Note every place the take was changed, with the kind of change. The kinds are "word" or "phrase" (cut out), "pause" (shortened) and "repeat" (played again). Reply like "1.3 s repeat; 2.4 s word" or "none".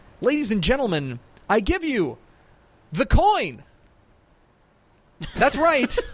none